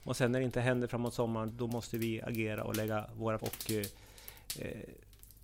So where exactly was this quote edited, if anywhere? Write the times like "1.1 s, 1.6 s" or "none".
1.5 s, 3.4 s